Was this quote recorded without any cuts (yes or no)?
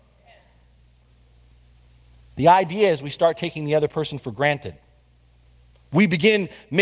yes